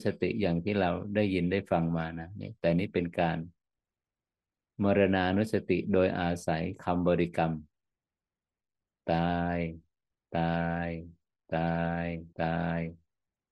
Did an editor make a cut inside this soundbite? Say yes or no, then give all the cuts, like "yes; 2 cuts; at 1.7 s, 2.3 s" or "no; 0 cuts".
yes; 1 cut; at 12.3 s